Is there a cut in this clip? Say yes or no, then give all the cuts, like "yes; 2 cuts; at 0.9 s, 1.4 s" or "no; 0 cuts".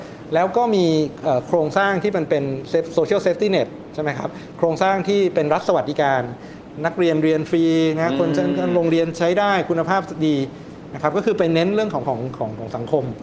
yes; 1 cut; at 12.0 s